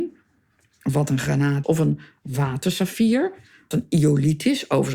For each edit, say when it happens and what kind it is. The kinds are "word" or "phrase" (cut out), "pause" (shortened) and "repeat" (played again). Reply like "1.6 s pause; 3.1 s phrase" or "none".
1.6 s word; 3.7 s word